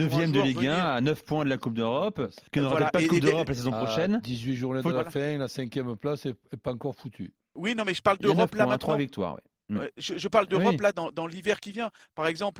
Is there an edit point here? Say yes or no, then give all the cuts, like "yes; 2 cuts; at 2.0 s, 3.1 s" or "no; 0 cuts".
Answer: yes; 2 cuts; at 2.5 s, 7.4 s